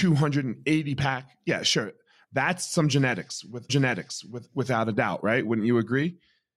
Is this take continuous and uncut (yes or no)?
no